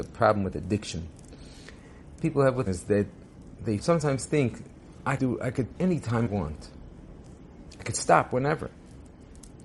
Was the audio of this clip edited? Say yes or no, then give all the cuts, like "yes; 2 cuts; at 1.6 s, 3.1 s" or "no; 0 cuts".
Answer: yes; 6 cuts; at 2.2 s, 2.7 s, 3.8 s, 5.2 s, 5.8 s, 6.3 s